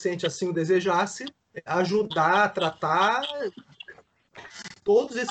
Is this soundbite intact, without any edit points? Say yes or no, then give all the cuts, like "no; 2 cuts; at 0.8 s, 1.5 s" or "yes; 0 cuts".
no; 1 cut; at 1.7 s